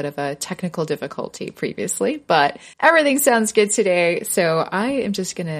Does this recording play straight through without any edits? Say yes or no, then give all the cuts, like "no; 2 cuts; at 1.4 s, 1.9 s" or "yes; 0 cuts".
no; 1 cut; at 2.7 s